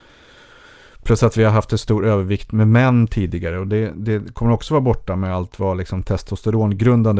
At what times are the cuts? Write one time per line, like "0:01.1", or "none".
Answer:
none